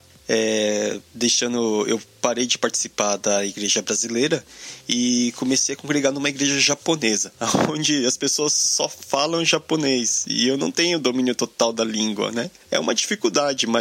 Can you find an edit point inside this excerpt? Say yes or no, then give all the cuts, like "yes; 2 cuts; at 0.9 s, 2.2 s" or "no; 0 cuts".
no; 0 cuts